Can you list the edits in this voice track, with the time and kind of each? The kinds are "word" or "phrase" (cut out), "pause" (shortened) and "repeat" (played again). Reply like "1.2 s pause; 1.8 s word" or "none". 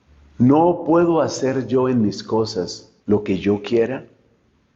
3.0 s pause